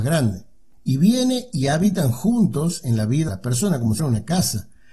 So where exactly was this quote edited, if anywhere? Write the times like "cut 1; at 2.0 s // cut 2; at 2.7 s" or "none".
cut 1; at 3.3 s // cut 2; at 4.0 s

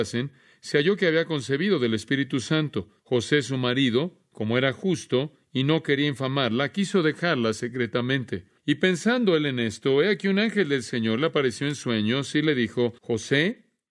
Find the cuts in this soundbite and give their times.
cut 1; at 3.0 s // cut 2; at 8.6 s // cut 3; at 13.0 s

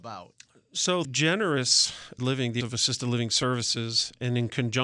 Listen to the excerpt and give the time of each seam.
cut 1; at 1.0 s // cut 2; at 2.2 s // cut 3; at 2.6 s

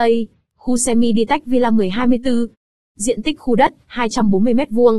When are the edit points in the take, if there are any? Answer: none

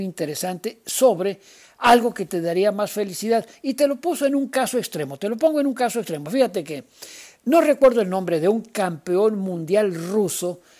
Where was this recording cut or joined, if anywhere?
none

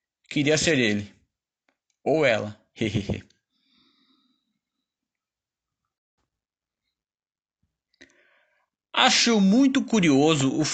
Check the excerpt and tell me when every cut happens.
none

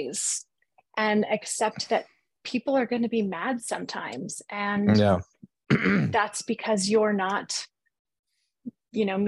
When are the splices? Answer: none

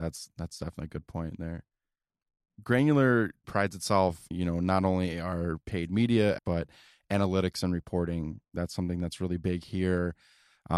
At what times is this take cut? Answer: cut 1; at 3.4 s // cut 2; at 4.3 s // cut 3; at 5.6 s // cut 4; at 6.4 s

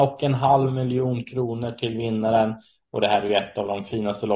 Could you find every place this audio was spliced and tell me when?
none

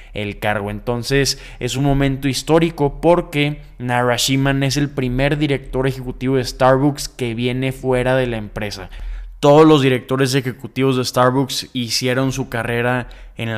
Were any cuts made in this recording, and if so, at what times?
none

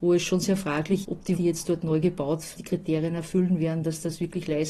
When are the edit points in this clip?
cut 1; at 1.0 s // cut 2; at 1.4 s // cut 3; at 2.6 s

